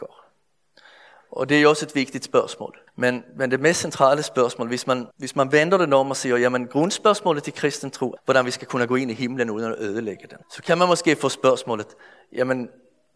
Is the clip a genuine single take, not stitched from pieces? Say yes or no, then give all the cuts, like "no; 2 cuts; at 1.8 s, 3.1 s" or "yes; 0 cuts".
no; 4 cuts; at 2.9 s, 5.1 s, 8.2 s, 10.4 s